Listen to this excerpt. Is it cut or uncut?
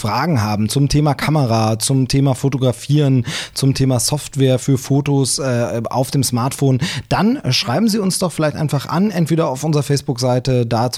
uncut